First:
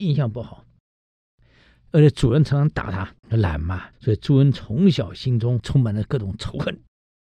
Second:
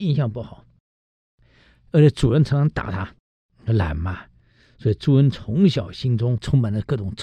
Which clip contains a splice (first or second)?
first